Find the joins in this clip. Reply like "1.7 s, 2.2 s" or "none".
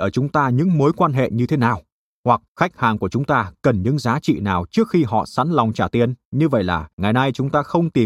2.5 s, 6.2 s, 6.9 s